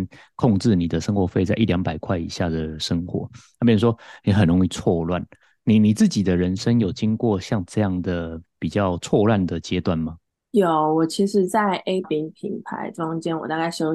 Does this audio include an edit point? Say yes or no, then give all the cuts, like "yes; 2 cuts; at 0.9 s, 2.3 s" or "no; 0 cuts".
yes; 1 cut; at 12.0 s